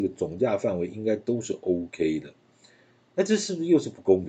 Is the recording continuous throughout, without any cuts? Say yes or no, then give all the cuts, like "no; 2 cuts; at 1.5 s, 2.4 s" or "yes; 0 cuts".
yes; 0 cuts